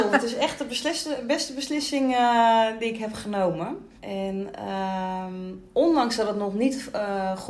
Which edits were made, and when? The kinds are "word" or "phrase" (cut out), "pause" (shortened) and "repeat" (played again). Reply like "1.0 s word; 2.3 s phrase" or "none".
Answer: 4.0 s pause